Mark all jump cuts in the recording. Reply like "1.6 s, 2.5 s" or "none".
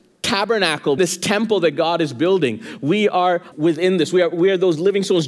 1.0 s, 3.5 s